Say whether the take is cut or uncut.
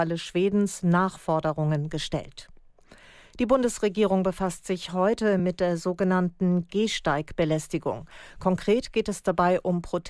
uncut